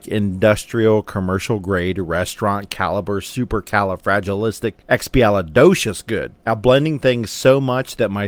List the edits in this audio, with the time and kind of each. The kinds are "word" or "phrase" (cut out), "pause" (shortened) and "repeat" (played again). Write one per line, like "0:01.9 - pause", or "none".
0:04.8 - pause
0:06.4 - pause